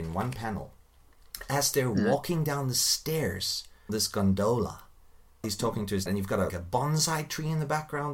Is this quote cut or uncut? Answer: cut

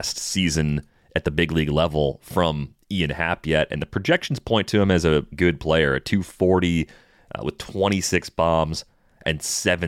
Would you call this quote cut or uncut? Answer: cut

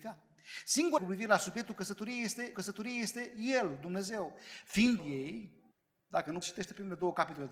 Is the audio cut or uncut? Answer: cut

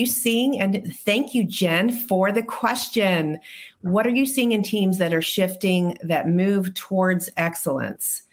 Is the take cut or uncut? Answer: uncut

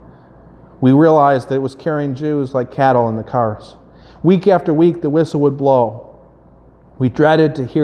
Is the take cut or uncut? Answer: uncut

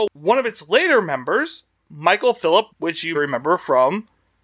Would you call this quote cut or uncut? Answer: cut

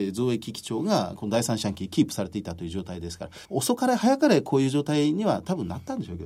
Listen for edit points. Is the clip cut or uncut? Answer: cut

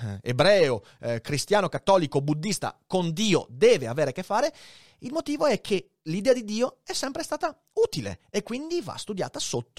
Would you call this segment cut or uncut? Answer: uncut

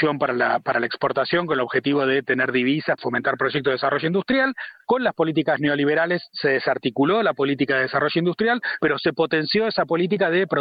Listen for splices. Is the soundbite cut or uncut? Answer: cut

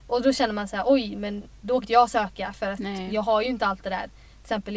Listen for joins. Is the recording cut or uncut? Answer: cut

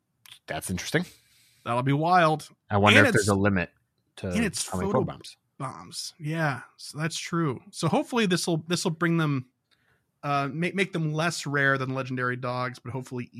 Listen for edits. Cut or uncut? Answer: uncut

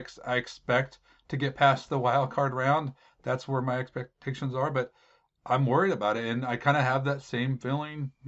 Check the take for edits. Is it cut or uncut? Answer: uncut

